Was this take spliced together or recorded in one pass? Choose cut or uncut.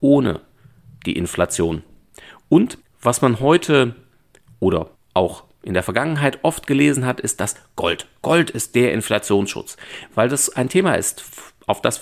cut